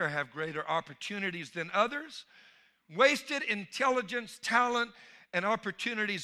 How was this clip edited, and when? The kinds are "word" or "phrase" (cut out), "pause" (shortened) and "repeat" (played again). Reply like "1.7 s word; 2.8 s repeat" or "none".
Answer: none